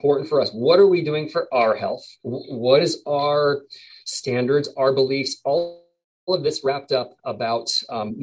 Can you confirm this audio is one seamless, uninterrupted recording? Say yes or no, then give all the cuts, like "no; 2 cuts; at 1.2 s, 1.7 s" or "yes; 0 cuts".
no; 1 cut; at 2.2 s